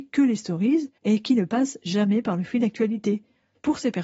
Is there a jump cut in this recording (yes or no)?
yes